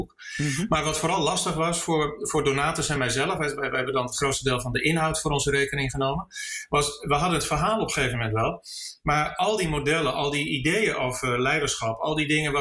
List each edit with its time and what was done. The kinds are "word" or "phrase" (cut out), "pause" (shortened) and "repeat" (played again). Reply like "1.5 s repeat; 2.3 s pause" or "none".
none